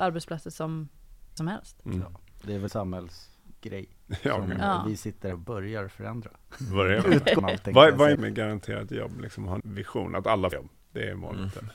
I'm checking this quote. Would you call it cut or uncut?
cut